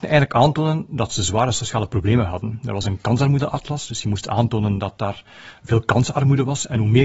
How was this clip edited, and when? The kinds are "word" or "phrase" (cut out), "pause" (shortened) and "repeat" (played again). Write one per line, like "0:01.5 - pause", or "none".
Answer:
none